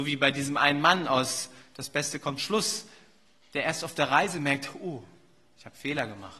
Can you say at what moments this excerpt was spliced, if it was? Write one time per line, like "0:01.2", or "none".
0:02.4